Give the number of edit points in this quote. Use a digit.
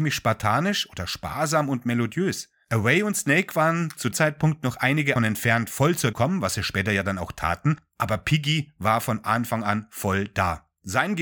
3